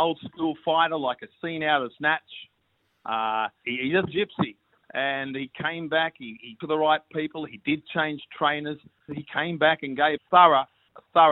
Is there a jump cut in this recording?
yes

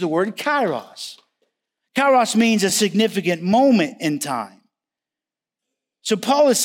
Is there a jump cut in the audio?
no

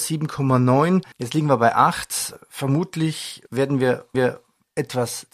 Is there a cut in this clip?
yes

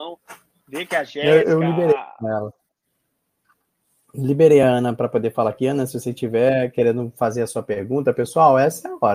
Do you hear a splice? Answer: no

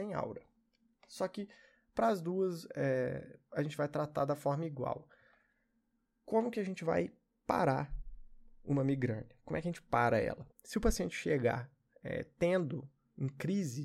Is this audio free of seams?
no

